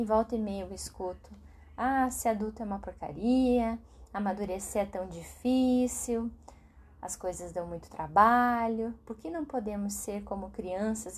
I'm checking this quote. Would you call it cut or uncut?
uncut